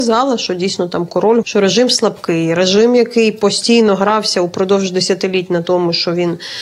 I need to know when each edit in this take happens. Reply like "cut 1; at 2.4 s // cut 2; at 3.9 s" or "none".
cut 1; at 1.4 s